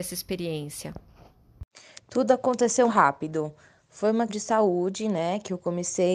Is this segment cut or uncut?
cut